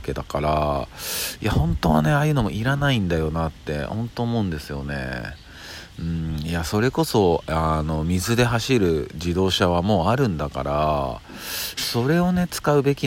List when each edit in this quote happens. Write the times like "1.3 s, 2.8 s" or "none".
none